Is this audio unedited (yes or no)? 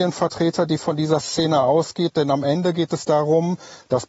yes